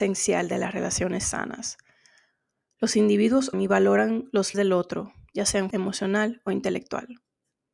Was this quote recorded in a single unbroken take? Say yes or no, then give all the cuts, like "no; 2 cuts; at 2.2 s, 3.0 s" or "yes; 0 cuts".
no; 3 cuts; at 3.5 s, 4.5 s, 5.7 s